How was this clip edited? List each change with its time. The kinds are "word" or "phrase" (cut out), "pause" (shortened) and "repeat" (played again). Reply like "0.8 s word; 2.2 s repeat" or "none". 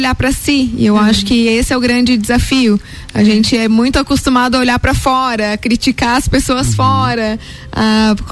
none